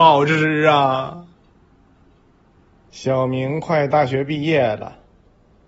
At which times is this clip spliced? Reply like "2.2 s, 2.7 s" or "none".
1.3 s